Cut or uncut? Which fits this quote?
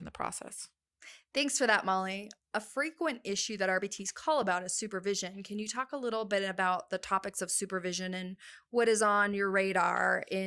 uncut